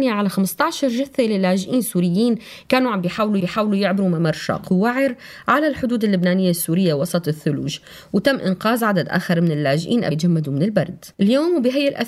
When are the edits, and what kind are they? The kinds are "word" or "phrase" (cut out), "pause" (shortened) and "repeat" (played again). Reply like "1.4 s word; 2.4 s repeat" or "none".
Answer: 3.4 s repeat; 10.1 s word; 11.1 s pause